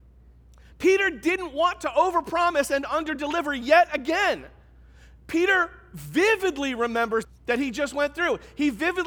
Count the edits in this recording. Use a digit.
1